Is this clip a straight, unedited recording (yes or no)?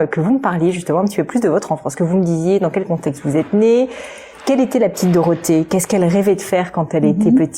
yes